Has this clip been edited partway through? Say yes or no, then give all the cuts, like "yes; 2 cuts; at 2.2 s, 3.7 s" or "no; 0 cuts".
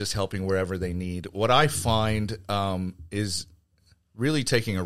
no; 0 cuts